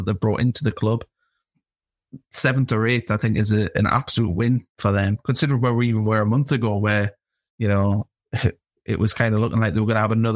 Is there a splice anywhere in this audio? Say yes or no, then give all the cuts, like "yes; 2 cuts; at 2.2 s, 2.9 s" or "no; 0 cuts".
no; 0 cuts